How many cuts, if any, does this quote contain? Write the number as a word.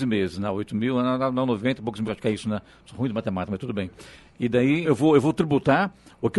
two